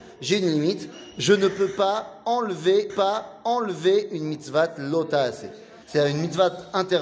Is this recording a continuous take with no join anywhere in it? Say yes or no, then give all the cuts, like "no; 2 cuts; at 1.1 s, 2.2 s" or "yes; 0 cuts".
no; 2 cuts; at 2.9 s, 5.8 s